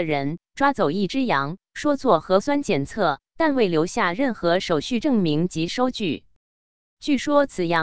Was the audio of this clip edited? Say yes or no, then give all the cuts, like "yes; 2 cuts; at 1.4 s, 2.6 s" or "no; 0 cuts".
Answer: no; 0 cuts